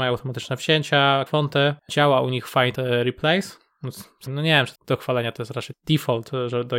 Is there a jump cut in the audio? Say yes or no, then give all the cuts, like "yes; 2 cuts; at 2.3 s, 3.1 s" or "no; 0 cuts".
yes; 5 cuts; at 1.3 s, 2.8 s, 4.3 s, 4.8 s, 5.7 s